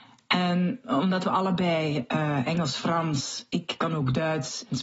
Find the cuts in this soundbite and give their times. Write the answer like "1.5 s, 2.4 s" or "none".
none